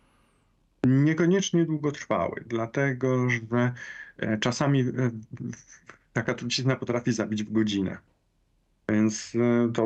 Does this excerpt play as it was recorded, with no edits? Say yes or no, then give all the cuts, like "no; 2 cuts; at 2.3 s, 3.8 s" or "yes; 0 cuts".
yes; 0 cuts